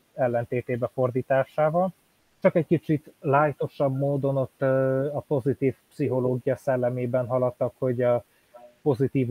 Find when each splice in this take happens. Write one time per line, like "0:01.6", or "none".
0:02.2

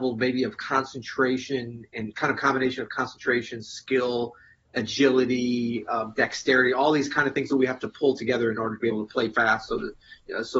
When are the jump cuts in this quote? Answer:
none

